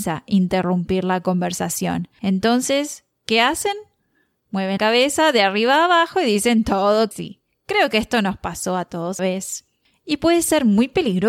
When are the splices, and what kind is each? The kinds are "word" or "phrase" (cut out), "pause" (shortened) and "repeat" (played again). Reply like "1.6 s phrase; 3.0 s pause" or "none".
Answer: 4.8 s word; 7.1 s word; 9.2 s word